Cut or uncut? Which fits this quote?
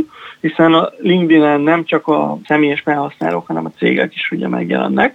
cut